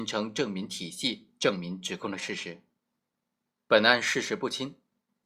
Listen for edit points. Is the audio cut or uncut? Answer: uncut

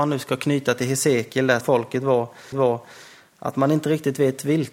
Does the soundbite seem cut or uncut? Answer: cut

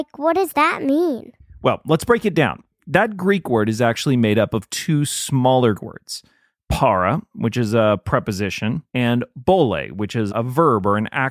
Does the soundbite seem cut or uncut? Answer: cut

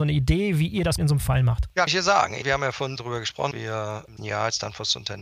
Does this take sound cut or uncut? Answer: cut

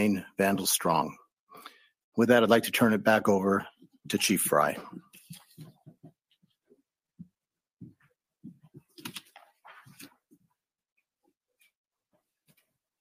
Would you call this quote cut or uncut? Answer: uncut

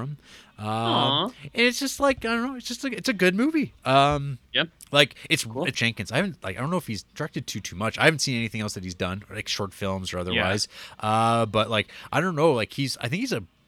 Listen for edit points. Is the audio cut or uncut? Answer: cut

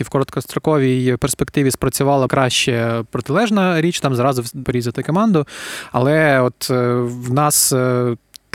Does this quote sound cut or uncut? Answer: cut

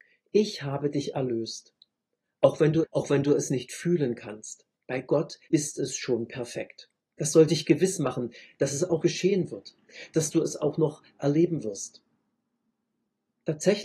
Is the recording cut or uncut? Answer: cut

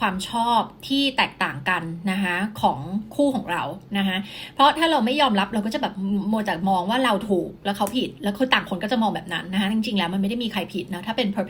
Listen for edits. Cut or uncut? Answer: uncut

